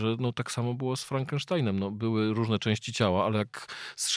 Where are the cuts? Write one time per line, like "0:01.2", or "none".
none